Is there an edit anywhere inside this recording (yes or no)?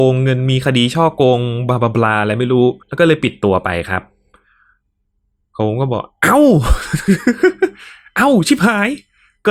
yes